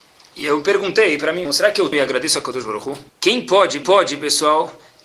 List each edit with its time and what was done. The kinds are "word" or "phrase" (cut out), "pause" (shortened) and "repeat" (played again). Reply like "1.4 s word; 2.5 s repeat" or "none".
1.5 s word; 1.9 s word; 3.1 s pause; 3.8 s repeat